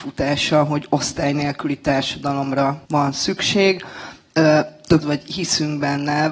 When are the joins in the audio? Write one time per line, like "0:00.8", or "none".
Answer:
0:02.8
0:05.0